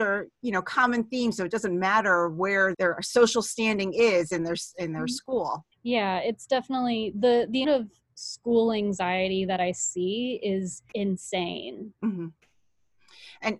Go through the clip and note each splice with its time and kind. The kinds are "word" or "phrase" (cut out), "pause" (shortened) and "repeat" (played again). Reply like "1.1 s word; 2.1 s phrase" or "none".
2.7 s word; 5.7 s pause; 7.6 s word; 10.9 s pause